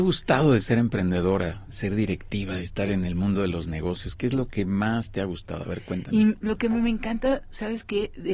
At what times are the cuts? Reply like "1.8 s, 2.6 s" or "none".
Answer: none